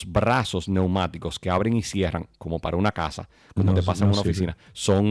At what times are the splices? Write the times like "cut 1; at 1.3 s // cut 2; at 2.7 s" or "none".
none